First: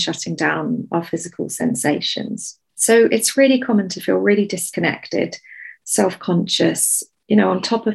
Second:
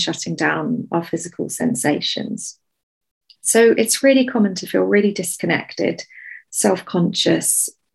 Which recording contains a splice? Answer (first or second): first